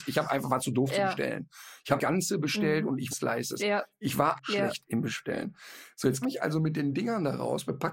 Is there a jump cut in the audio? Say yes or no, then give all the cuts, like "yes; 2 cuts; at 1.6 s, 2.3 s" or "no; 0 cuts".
yes; 4 cuts; at 2.0 s, 3.1 s, 4.4 s, 6.2 s